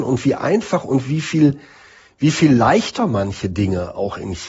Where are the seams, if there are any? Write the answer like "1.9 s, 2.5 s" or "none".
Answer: none